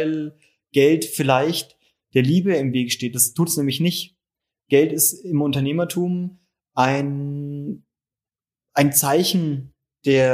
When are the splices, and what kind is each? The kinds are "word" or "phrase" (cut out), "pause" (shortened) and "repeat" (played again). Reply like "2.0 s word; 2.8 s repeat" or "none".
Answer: none